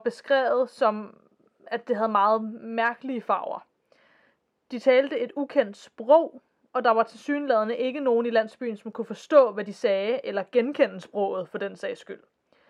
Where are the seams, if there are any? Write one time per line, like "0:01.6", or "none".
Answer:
none